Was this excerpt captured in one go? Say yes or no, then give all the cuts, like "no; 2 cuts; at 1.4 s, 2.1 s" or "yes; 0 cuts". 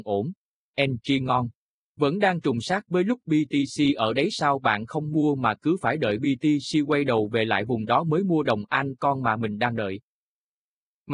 yes; 0 cuts